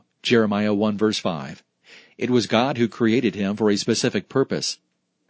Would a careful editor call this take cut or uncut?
uncut